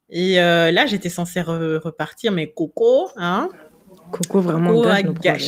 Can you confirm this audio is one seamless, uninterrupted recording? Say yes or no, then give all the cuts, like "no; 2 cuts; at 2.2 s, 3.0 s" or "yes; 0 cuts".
yes; 0 cuts